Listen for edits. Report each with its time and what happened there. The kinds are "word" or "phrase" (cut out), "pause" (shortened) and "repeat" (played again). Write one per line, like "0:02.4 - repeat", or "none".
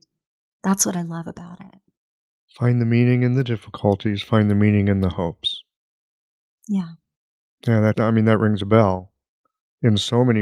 0:07.9 - word